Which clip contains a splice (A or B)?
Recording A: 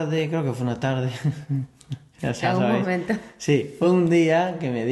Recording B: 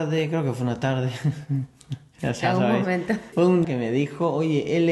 B